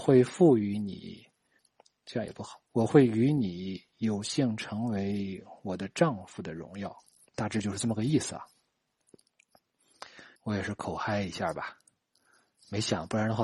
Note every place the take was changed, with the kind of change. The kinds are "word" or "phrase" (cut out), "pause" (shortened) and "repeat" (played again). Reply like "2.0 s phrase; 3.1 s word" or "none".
1.6 s pause; 2.7 s pause; 7.3 s word; 10.4 s pause